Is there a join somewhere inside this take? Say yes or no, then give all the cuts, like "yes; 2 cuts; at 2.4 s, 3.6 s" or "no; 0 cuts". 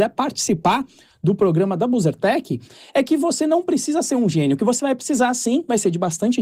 no; 0 cuts